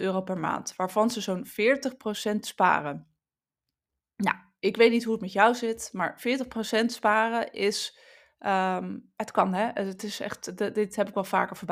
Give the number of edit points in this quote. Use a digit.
0